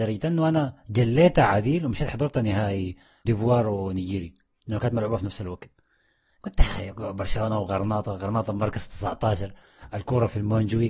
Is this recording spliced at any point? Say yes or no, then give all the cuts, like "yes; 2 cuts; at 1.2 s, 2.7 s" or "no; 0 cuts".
yes; 1 cut; at 3.2 s